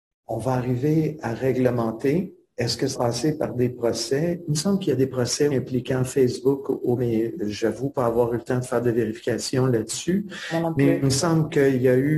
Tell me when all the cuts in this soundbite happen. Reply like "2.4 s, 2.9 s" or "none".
2.9 s, 5.5 s, 7.0 s